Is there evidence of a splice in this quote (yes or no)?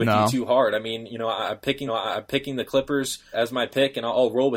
yes